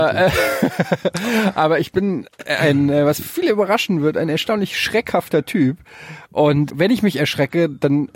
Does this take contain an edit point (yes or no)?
yes